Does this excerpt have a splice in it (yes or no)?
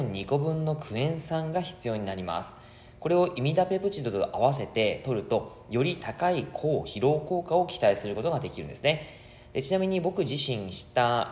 no